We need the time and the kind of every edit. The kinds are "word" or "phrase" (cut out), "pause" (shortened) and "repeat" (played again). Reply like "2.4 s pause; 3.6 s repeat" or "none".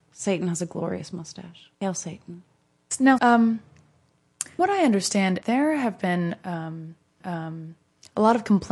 1.7 s pause; 3.2 s word; 4.6 s word; 5.4 s word; 7.2 s repeat